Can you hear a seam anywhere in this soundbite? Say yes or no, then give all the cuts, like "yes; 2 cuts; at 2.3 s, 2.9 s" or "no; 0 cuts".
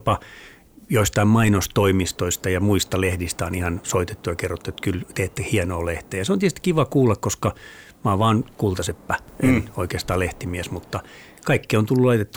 no; 0 cuts